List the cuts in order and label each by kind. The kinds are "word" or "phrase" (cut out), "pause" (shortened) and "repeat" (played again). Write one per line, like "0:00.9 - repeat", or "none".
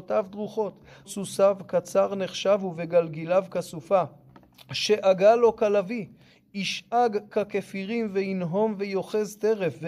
0:01.0 - word